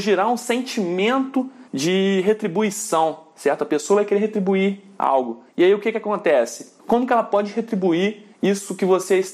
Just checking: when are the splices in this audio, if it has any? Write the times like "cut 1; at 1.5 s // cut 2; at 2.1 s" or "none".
cut 1; at 1.7 s // cut 2; at 5.5 s // cut 3; at 6.8 s // cut 4; at 8.3 s